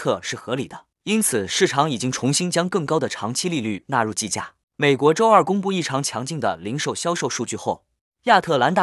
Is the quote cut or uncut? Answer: cut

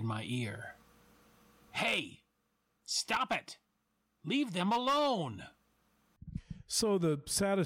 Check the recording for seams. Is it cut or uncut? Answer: uncut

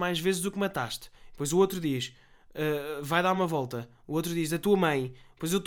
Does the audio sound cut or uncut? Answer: uncut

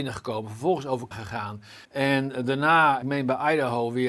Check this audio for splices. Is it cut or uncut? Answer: cut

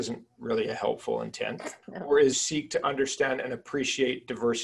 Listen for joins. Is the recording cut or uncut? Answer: cut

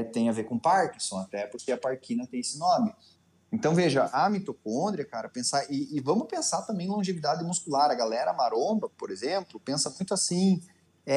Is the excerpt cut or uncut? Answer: uncut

